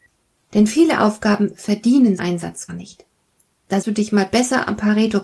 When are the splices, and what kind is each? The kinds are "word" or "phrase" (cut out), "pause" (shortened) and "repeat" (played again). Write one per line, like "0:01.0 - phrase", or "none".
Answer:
0:02.2 - word
0:02.7 - word
0:03.8 - word